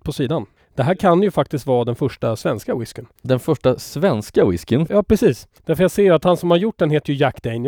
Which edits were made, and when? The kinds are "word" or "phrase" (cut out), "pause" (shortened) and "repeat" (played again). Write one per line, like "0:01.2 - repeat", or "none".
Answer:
0:03.2 - pause
0:05.6 - pause